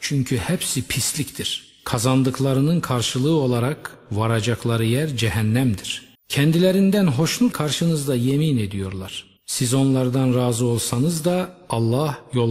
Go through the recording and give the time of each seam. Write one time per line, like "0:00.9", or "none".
0:06.1
0:07.5
0:09.4

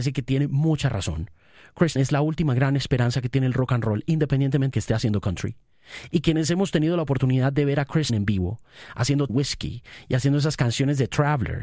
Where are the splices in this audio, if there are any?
0:02.0
0:04.7
0:08.1
0:09.3

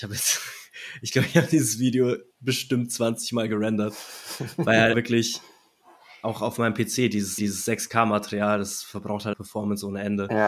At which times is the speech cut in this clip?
0:02.3
0:04.9
0:07.4
0:09.3

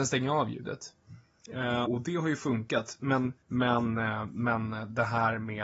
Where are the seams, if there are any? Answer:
0:01.9
0:03.4

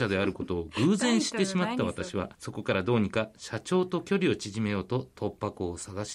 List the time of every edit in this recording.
0:02.3

